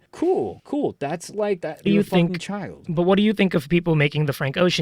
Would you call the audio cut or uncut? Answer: cut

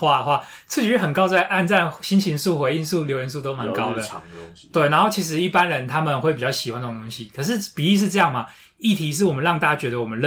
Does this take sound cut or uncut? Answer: uncut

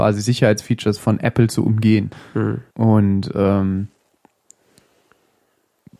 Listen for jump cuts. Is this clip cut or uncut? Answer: cut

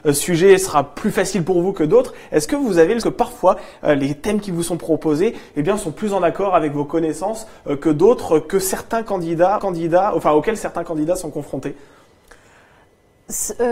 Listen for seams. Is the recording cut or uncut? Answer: cut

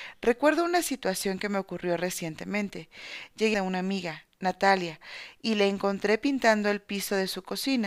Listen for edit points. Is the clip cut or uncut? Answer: cut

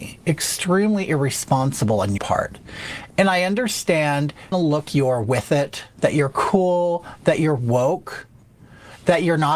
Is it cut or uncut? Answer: cut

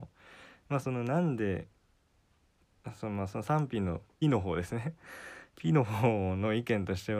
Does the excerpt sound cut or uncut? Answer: cut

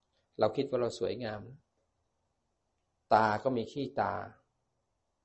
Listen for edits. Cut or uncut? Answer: uncut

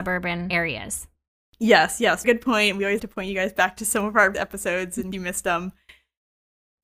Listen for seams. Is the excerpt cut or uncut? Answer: cut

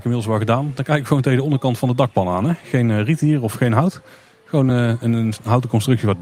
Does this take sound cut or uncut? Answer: uncut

